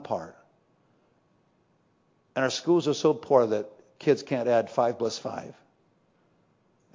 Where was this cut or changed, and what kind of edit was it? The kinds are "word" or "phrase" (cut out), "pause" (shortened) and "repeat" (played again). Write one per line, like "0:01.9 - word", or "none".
none